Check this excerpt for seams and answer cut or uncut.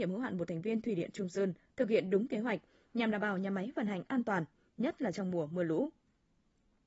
uncut